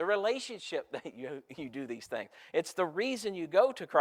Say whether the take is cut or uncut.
uncut